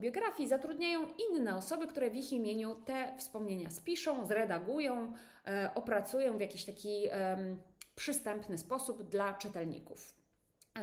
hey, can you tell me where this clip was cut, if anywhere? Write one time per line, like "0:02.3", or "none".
none